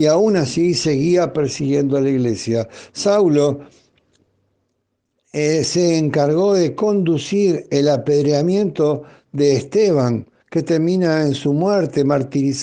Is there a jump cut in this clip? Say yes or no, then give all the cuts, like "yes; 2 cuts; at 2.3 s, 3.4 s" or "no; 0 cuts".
no; 0 cuts